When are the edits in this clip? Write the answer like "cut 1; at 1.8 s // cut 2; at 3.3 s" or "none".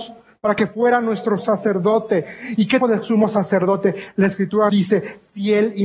cut 1; at 1.4 s // cut 2; at 2.8 s // cut 3; at 4.7 s